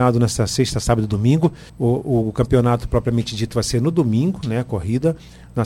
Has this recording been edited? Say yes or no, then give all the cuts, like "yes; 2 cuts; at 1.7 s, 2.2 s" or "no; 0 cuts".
yes; 1 cut; at 1.7 s